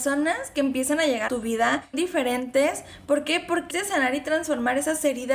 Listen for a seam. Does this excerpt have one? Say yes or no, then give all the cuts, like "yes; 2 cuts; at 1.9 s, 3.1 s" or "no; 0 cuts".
yes; 3 cuts; at 1.3 s, 1.9 s, 3.7 s